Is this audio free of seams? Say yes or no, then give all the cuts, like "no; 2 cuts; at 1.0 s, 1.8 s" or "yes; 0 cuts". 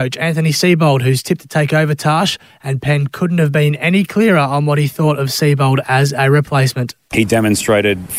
yes; 0 cuts